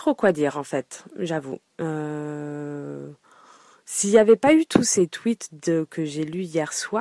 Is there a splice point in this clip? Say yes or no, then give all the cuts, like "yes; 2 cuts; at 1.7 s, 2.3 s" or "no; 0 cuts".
no; 0 cuts